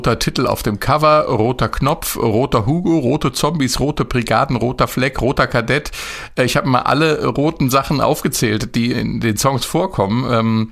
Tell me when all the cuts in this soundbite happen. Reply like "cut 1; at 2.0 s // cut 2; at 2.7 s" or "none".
cut 1; at 8.9 s